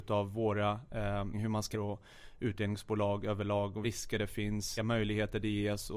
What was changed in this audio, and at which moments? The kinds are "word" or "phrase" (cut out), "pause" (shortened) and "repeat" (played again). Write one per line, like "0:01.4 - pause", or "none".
0:01.3 - phrase
0:01.7 - phrase
0:03.8 - word
0:04.8 - word